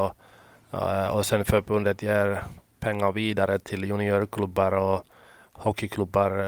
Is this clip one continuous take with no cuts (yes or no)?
yes